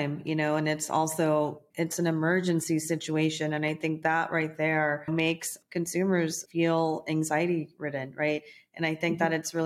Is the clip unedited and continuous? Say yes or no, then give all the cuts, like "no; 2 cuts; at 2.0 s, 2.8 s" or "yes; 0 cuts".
no; 1 cut; at 1.7 s